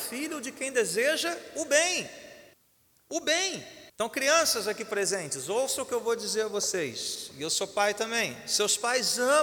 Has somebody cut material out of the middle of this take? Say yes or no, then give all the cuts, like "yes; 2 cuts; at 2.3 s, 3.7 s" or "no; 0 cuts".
yes; 2 cuts; at 2.5 s, 3.9 s